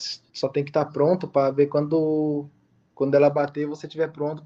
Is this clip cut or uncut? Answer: uncut